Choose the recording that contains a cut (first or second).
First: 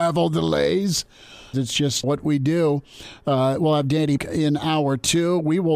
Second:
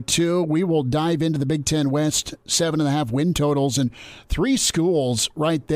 first